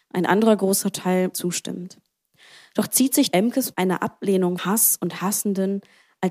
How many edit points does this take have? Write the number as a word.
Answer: four